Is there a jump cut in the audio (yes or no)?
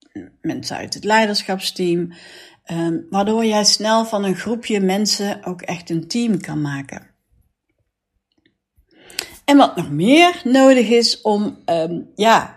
no